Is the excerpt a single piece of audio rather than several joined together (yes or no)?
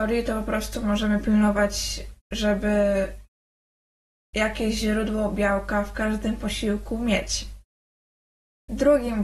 yes